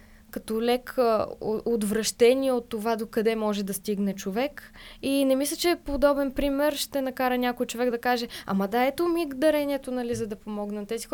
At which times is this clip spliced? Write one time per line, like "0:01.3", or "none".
none